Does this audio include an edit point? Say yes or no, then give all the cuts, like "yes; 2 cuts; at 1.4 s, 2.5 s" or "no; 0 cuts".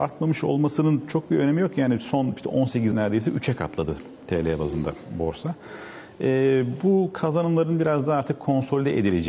yes; 1 cut; at 2.9 s